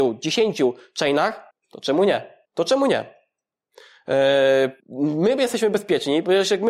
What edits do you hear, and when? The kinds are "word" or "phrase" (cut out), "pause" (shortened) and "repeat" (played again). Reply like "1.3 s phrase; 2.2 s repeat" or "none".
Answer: 1.5 s pause; 2.4 s pause; 4.8 s pause